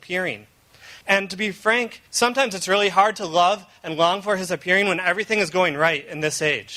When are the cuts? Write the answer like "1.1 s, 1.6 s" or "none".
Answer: 1.0 s, 2.1 s